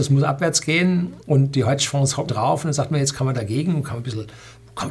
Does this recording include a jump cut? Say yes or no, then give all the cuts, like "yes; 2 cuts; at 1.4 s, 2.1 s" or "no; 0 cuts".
yes; 3 cuts; at 1.2 s, 2.3 s, 3.3 s